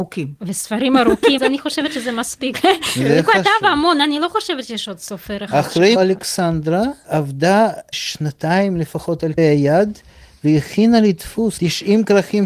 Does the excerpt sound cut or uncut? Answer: cut